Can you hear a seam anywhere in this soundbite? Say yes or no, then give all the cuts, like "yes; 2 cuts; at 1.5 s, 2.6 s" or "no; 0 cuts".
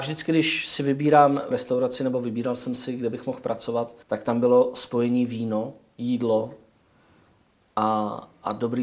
yes; 2 cuts; at 1.5 s, 4.0 s